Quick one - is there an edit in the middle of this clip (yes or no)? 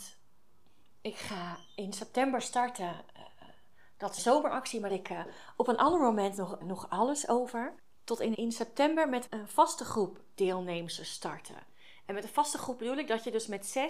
yes